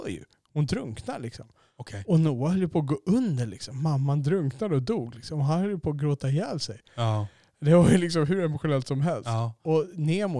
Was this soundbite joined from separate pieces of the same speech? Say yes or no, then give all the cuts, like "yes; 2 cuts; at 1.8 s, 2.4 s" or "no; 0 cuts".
no; 0 cuts